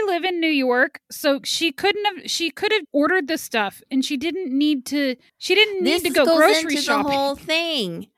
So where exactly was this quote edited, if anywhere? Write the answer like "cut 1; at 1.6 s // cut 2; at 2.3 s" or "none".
cut 1; at 2.8 s

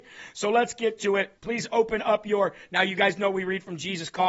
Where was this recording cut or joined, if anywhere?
cut 1; at 1.4 s

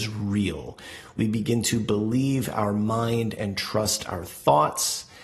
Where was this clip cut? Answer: none

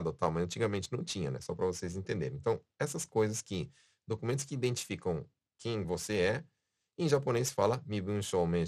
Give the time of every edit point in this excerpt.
none

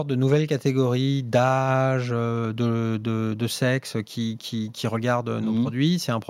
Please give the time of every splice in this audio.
none

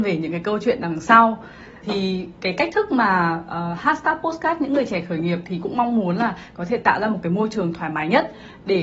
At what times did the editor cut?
cut 1; at 1.8 s

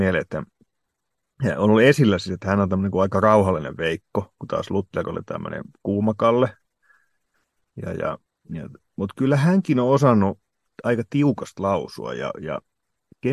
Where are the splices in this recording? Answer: none

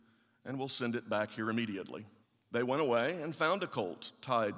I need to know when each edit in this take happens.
cut 1; at 2.2 s

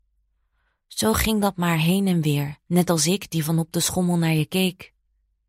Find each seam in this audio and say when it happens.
cut 1; at 2.6 s

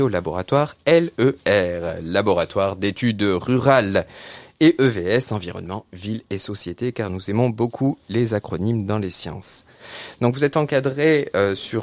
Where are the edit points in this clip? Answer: none

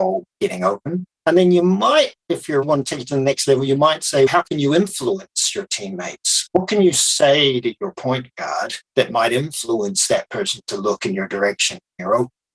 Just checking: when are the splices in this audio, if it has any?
cut 1; at 1.1 s // cut 2; at 2.6 s // cut 3; at 4.3 s // cut 4; at 8.8 s

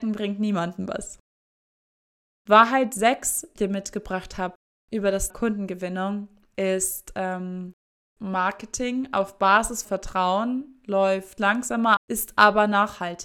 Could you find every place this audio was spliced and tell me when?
cut 1; at 3.6 s // cut 2; at 5.3 s // cut 3; at 8.2 s // cut 4; at 9.8 s // cut 5; at 11.4 s // cut 6; at 12.0 s

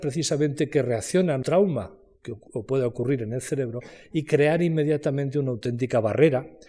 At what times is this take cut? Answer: cut 1; at 1.4 s

